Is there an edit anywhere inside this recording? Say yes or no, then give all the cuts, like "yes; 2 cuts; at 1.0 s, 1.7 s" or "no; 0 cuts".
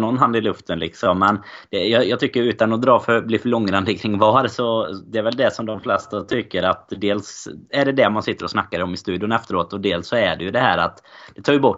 no; 0 cuts